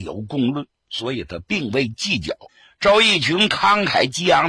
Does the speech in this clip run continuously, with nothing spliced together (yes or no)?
no